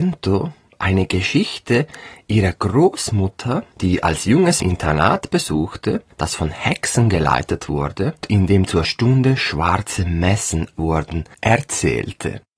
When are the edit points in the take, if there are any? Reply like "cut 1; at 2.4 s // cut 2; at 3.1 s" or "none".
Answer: cut 1; at 4.6 s // cut 2; at 8.2 s // cut 3; at 8.8 s // cut 4; at 10.8 s

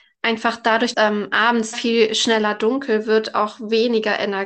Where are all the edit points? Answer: cut 1; at 0.9 s // cut 2; at 1.7 s

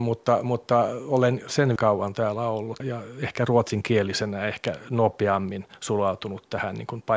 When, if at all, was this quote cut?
cut 1; at 1.8 s // cut 2; at 2.8 s

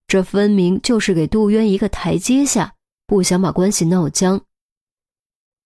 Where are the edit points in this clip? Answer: none

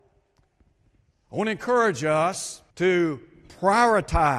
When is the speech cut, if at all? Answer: cut 1; at 2.7 s

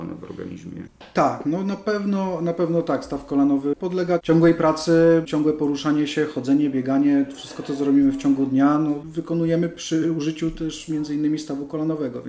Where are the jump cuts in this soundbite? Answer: none

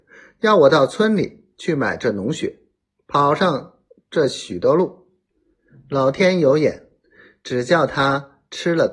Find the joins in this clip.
none

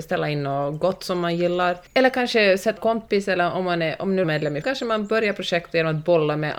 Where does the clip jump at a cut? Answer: cut 1; at 1.9 s // cut 2; at 2.8 s // cut 3; at 4.2 s // cut 4; at 4.6 s

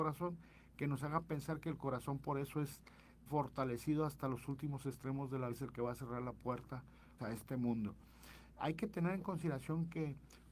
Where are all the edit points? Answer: cut 1; at 3.3 s // cut 2; at 5.5 s // cut 3; at 7.2 s

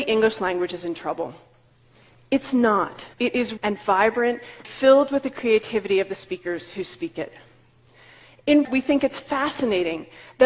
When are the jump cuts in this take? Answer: cut 1; at 3.1 s // cut 2; at 3.6 s // cut 3; at 4.6 s // cut 4; at 8.6 s

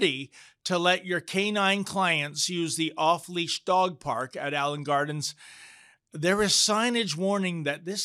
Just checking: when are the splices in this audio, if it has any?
none

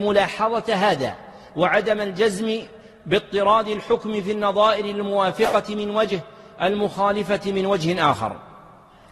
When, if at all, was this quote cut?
none

